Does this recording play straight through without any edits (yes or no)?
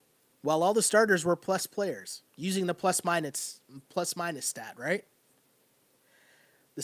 no